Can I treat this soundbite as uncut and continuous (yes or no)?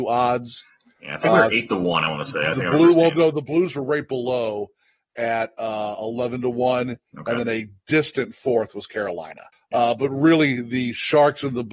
no